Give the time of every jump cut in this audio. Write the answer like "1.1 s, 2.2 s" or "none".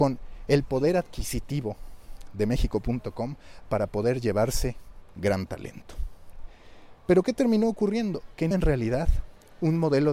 8.5 s